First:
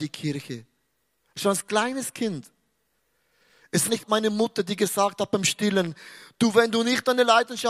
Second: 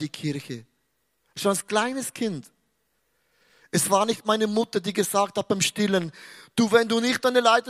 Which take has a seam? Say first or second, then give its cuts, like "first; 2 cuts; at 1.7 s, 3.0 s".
first; 1 cut; at 3.9 s